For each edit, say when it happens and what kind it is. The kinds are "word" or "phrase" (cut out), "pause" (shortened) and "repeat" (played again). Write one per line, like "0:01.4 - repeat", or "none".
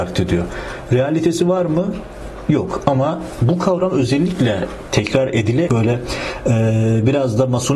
0:05.7 - phrase